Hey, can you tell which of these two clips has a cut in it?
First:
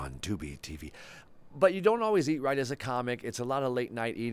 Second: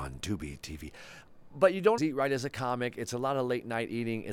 second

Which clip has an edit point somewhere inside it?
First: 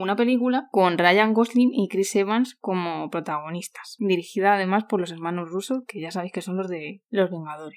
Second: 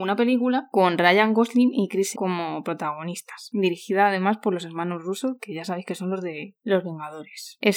second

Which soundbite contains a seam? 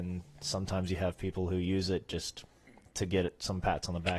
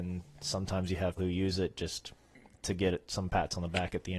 second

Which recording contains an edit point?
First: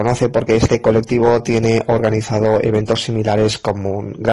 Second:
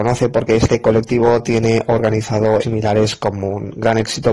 second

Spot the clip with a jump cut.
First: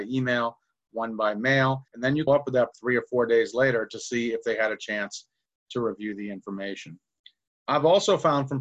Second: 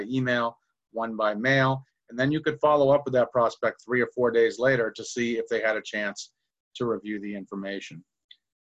first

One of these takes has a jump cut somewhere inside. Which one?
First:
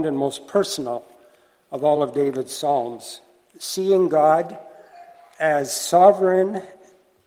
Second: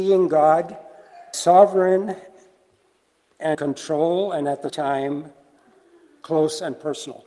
second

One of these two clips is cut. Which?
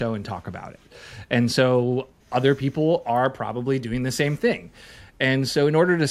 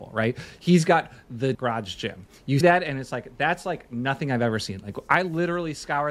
second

